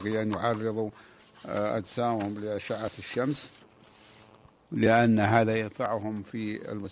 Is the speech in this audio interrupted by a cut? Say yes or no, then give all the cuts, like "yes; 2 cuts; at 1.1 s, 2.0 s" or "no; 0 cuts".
no; 0 cuts